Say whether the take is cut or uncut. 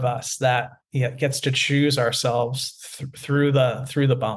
uncut